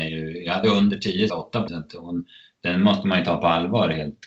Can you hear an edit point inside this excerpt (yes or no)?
yes